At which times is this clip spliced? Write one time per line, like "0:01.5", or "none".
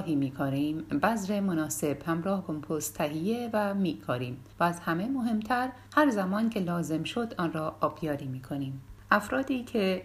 0:02.4
0:04.5
0:05.9